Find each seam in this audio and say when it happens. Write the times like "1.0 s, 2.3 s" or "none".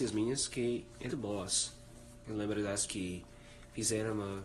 1.1 s, 2.9 s